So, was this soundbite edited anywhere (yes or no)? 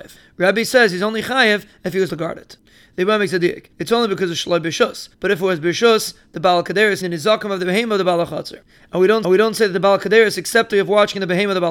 yes